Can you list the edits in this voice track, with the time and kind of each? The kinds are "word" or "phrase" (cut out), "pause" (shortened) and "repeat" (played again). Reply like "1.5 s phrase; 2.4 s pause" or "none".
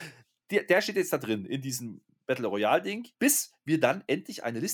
3.1 s pause